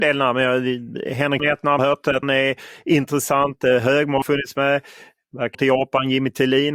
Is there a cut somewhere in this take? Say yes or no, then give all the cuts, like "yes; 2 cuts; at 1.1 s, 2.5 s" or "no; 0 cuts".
yes; 5 cuts; at 1.4 s, 1.8 s, 2.2 s, 4.2 s, 5.5 s